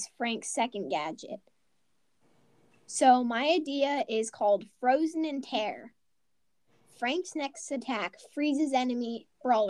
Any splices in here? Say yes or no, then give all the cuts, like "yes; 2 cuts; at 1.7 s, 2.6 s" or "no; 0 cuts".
no; 0 cuts